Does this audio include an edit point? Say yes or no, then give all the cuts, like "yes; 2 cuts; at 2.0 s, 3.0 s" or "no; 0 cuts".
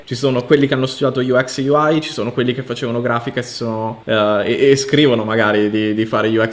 no; 0 cuts